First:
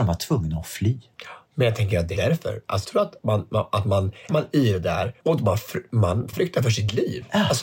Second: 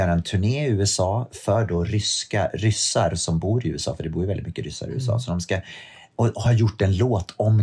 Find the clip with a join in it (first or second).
first